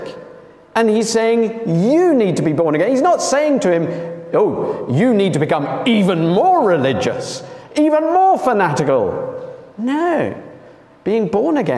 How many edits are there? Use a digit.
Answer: 1